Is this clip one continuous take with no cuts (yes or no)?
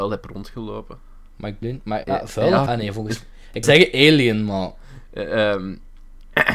no